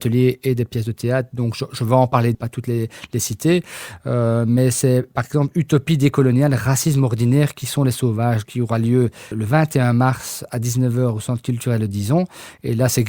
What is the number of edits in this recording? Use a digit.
3